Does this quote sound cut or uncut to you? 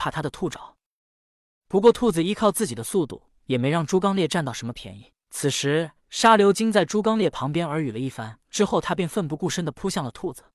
cut